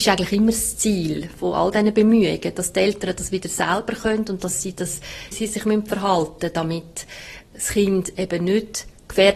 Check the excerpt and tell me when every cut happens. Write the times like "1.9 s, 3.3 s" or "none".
5.3 s